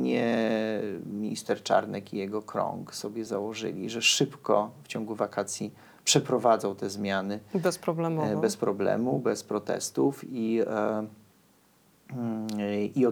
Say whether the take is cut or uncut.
uncut